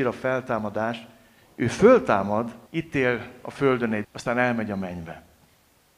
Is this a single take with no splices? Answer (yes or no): no